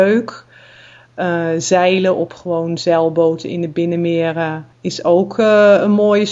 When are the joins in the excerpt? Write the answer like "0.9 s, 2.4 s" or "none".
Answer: 4.7 s